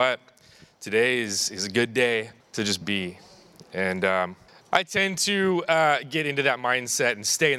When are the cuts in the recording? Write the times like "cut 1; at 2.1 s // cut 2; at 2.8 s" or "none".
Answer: cut 1; at 2.4 s // cut 2; at 2.8 s // cut 3; at 4.5 s